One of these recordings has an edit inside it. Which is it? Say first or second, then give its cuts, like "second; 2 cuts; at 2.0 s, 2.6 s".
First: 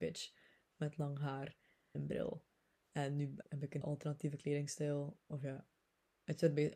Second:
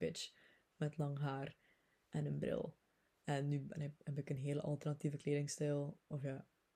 first; 3 cuts; at 1.9 s, 3.4 s, 3.8 s